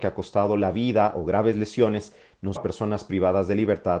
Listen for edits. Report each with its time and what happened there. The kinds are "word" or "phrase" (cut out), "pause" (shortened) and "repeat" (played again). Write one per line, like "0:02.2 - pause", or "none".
0:02.6 - word